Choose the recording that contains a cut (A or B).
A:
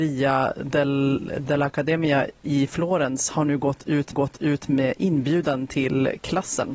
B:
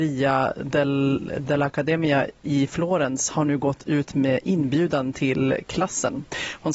A